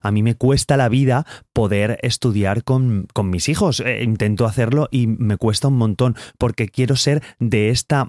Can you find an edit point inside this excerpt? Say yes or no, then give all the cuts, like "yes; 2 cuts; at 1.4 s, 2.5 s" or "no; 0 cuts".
no; 0 cuts